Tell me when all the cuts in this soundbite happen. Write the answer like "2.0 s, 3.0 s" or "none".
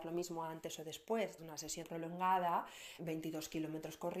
1.4 s, 1.8 s, 3.0 s